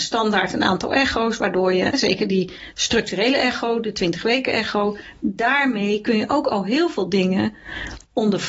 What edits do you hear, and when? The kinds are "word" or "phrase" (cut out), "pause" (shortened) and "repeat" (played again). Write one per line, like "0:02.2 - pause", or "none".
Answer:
0:01.9 - word